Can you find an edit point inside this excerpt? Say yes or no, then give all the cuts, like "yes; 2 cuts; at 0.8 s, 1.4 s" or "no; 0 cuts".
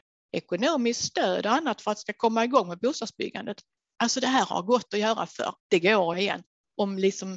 yes; 2 cuts; at 5.6 s, 6.1 s